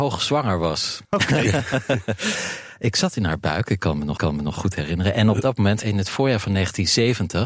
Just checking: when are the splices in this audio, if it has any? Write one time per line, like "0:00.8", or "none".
0:01.0
0:04.2